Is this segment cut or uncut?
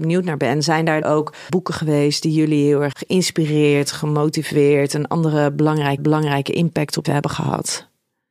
cut